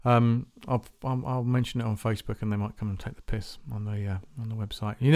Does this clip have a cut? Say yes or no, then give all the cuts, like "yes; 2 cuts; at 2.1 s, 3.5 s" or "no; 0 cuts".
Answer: no; 0 cuts